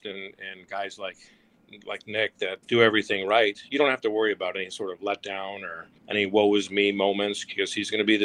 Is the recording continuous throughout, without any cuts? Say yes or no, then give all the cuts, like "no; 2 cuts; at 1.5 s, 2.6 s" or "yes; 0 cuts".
no; 3 cuts; at 1.8 s, 2.6 s, 6.0 s